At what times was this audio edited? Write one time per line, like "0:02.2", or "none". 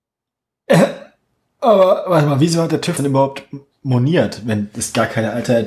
0:03.0